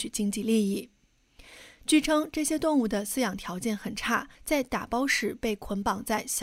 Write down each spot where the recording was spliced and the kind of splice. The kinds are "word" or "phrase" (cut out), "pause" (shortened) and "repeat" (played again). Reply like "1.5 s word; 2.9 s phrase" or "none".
4.3 s pause